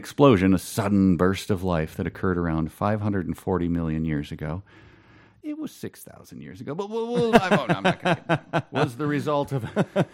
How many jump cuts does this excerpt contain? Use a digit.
0